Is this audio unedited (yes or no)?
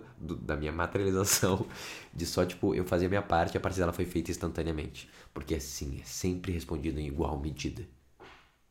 yes